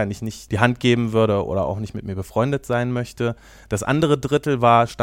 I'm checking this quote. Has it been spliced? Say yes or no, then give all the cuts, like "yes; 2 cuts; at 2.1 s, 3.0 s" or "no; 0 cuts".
no; 0 cuts